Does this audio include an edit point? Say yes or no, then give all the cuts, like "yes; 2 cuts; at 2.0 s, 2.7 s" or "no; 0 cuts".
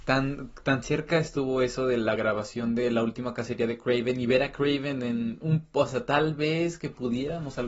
no; 0 cuts